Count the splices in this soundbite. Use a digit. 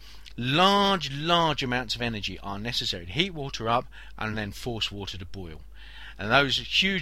0